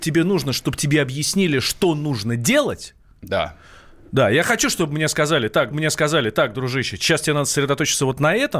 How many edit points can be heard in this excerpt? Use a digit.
1